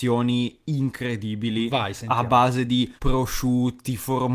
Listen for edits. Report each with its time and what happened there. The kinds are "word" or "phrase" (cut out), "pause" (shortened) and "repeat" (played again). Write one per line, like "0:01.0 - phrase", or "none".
0:03.0 - pause